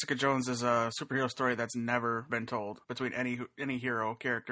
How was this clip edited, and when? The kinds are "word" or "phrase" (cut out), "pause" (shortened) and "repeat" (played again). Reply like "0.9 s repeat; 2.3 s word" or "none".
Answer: 2.3 s word; 2.8 s word